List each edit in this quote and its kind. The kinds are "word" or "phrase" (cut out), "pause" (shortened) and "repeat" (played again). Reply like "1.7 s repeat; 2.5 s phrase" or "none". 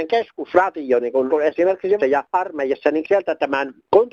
1.3 s word; 2.0 s word